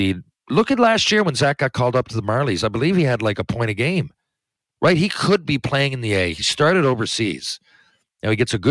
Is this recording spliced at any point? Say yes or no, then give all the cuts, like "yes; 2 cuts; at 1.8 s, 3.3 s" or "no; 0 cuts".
no; 0 cuts